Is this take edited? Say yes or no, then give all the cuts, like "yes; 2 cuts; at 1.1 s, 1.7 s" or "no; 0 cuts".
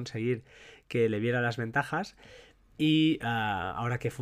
no; 0 cuts